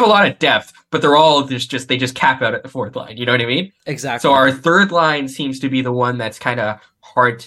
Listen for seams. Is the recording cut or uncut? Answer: uncut